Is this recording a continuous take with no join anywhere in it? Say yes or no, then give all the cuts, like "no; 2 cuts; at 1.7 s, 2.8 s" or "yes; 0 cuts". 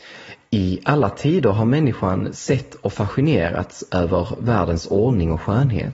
yes; 0 cuts